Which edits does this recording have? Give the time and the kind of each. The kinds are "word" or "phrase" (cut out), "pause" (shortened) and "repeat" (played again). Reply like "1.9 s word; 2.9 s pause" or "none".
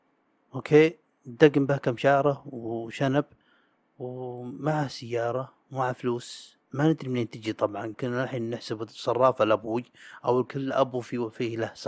7.9 s word